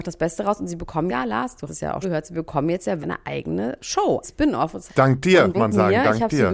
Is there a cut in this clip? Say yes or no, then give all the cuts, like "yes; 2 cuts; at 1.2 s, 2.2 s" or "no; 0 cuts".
yes; 7 cuts; at 1.1 s, 1.7 s, 2.0 s, 3.0 s, 4.2 s, 4.9 s, 5.5 s